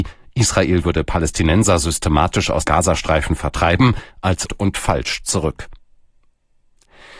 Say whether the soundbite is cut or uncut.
cut